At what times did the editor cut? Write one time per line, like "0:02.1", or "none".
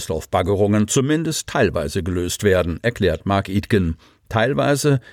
none